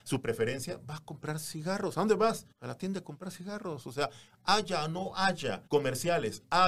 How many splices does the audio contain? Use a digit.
2